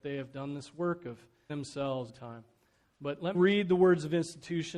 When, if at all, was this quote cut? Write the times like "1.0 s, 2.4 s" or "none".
1.5 s, 2.1 s, 3.3 s